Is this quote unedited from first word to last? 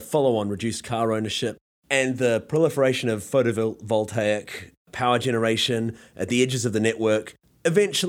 yes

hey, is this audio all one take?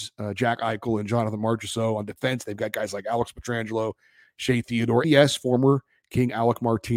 no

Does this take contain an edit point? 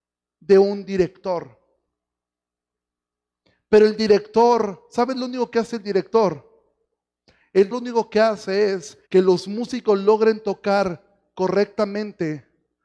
yes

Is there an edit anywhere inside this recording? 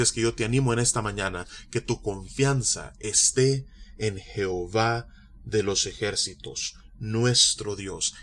no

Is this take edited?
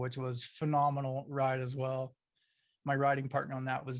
no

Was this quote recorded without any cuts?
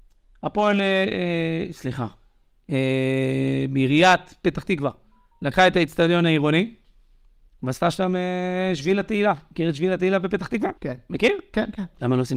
no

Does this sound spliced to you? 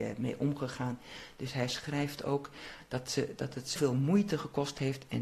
yes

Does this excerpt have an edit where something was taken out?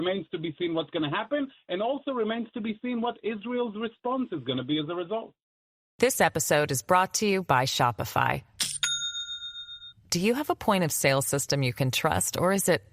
no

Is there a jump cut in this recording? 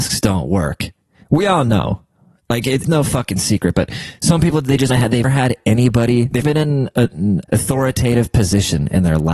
yes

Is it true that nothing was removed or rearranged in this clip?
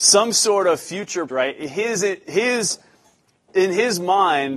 no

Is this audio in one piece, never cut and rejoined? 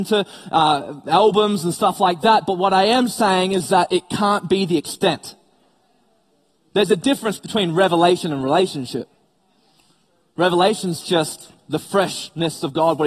yes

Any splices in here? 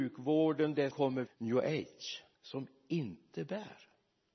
yes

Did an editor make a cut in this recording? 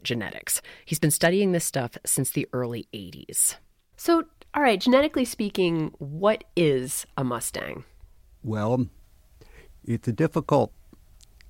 no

